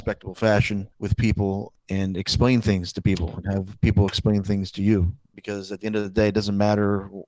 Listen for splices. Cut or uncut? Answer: cut